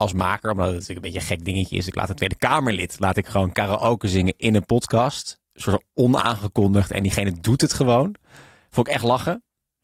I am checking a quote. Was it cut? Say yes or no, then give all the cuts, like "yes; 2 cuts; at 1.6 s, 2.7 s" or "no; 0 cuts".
yes; 1 cut; at 5.5 s